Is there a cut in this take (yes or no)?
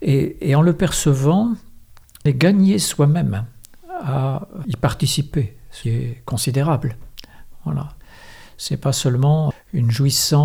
yes